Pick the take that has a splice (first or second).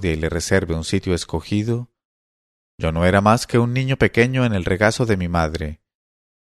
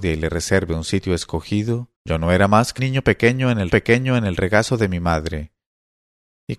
second